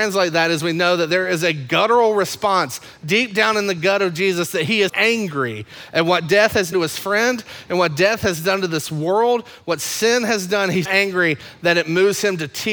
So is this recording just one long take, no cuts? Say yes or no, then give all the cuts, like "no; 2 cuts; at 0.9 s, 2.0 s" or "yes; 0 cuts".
no; 3 cuts; at 4.9 s, 6.7 s, 10.8 s